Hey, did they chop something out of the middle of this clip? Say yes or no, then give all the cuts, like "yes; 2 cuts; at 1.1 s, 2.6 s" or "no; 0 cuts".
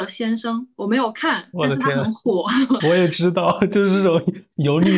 yes; 1 cut; at 2.8 s